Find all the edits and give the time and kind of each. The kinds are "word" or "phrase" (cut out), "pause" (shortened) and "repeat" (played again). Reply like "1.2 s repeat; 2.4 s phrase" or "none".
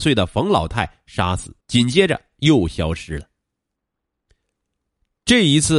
1.6 s pause